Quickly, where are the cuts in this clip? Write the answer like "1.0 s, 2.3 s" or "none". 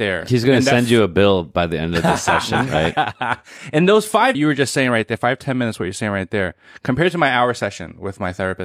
4.3 s

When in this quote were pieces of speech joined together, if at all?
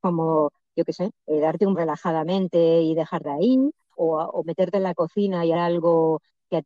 1.2 s, 1.7 s, 3.2 s, 4.0 s, 5.5 s

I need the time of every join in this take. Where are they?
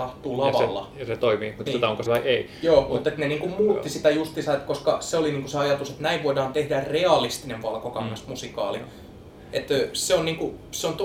1.7 s, 2.1 s

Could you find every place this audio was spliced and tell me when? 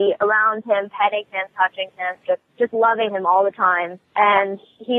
2.5 s, 3.1 s, 4.0 s

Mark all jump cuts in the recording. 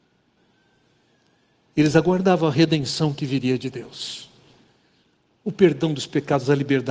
none

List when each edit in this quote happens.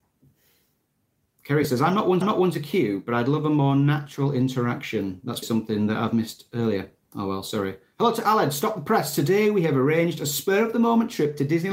2.2 s, 5.4 s

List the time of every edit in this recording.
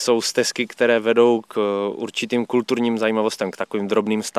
none

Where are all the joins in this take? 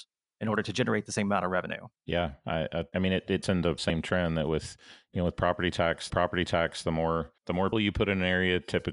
2.0 s, 2.9 s, 3.4 s, 3.8 s, 6.1 s, 7.4 s, 7.7 s

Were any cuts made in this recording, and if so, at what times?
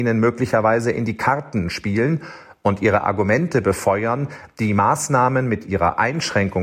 none

